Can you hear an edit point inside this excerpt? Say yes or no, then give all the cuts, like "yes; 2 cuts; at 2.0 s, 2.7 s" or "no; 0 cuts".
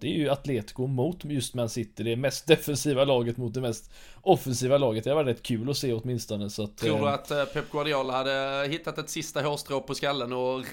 no; 0 cuts